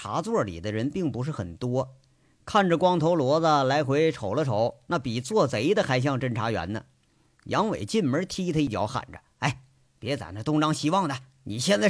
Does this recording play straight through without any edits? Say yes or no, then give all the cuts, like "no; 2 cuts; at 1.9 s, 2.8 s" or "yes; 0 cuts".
yes; 0 cuts